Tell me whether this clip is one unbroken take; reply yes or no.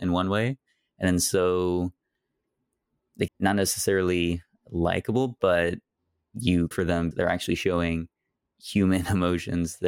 no